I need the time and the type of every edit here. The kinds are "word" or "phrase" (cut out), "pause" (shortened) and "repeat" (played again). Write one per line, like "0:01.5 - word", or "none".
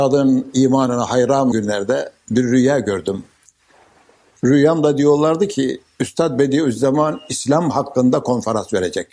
0:01.5 - word